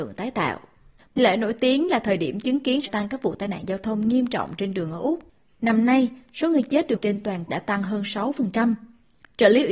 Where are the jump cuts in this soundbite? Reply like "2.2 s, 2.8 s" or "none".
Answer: 1.2 s, 2.9 s, 7.0 s, 7.5 s